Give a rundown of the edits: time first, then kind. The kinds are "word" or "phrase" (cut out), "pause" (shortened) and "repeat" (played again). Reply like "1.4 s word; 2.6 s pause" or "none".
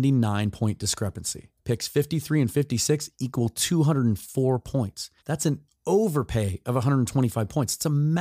1.6 s pause; 5.2 s pause